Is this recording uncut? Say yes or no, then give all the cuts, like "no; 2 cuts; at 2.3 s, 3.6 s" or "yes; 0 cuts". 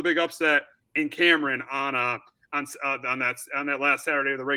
yes; 0 cuts